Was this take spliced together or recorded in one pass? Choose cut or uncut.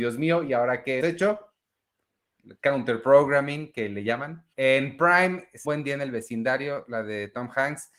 cut